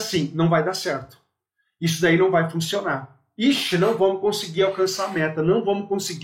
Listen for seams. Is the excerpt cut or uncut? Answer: uncut